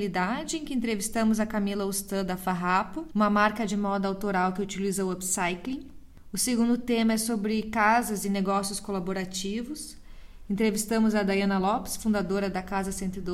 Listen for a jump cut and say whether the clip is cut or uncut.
uncut